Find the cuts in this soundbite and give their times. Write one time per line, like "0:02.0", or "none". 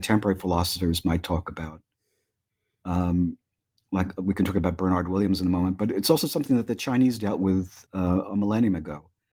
0:07.9